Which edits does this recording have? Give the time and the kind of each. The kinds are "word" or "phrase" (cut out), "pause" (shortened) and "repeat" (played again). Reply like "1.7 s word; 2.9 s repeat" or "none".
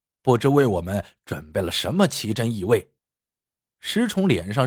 3.0 s pause